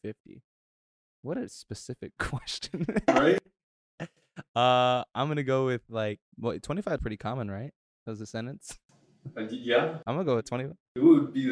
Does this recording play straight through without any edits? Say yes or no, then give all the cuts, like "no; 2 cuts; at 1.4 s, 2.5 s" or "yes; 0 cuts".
no; 4 cuts; at 6.2 s, 7.0 s, 7.9 s, 10.4 s